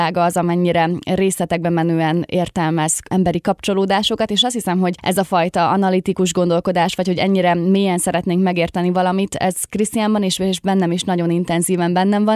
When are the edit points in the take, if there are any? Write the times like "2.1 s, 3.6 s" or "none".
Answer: none